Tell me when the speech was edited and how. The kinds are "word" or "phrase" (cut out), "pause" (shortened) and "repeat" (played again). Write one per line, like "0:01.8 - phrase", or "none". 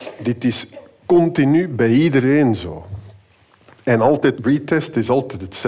0:04.3 - word